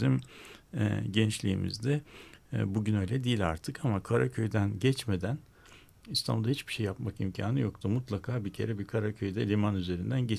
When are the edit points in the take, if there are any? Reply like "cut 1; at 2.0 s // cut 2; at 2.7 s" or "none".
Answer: none